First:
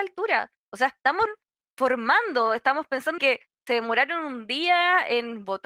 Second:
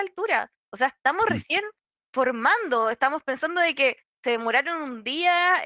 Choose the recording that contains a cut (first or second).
first